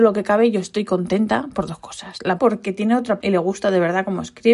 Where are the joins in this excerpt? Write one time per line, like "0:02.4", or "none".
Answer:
0:02.4
0:03.2